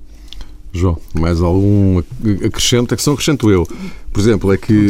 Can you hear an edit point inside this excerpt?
no; 0 cuts

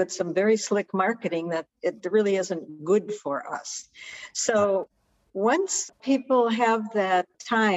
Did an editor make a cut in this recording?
no; 0 cuts

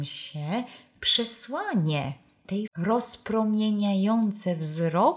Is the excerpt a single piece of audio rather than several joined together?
no; 1 cut; at 2.7 s

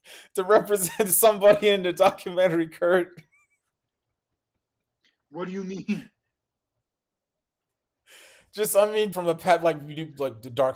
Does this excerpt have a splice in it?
yes; 1 cut; at 9.1 s

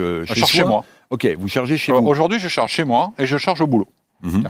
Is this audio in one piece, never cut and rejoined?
yes; 0 cuts

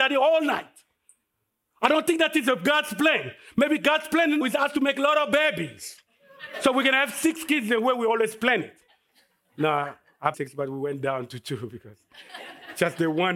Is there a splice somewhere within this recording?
yes; 2 cuts; at 4.4 s, 10.3 s

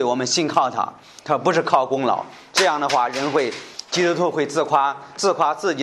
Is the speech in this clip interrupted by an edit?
no; 0 cuts

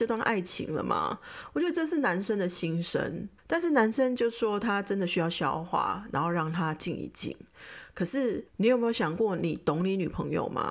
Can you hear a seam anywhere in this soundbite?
yes; 2 cuts; at 3.4 s, 8.5 s

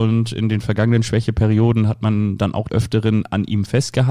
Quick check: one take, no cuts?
no; 1 cut; at 2.7 s

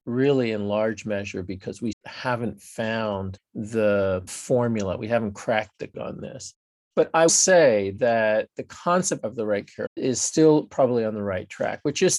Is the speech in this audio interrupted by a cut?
yes; 4 cuts; at 1.9 s, 5.9 s, 7.3 s, 9.9 s

